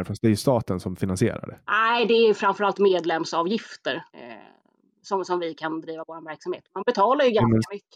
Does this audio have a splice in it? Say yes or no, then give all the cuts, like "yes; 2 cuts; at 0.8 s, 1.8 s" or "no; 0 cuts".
yes; 2 cuts; at 1.6 s, 4.1 s